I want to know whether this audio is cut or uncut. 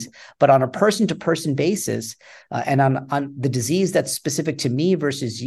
uncut